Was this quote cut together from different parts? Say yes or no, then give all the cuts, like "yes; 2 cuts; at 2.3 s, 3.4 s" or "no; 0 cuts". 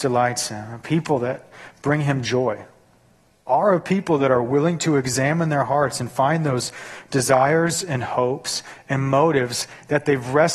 no; 0 cuts